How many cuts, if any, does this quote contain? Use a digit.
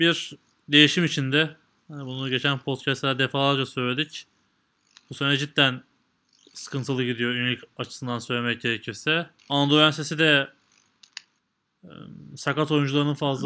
1